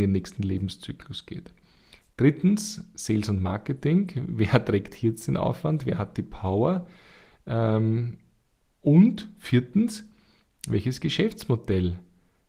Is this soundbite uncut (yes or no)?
yes